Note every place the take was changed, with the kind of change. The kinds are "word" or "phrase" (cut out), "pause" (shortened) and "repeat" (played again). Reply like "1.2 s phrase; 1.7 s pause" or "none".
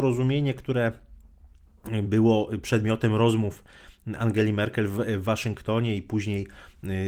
none